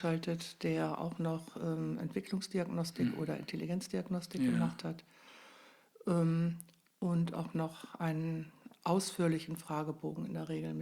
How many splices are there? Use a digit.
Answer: 0